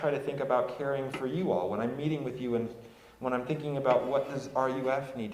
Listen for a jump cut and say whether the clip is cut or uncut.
uncut